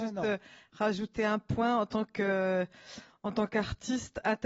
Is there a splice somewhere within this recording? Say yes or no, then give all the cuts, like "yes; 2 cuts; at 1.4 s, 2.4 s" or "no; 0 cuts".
no; 0 cuts